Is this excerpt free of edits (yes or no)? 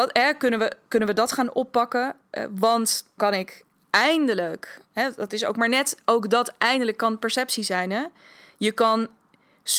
no